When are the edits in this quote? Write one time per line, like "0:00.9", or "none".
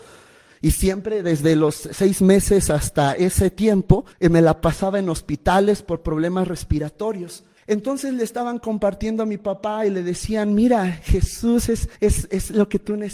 0:04.1
0:07.6
0:12.0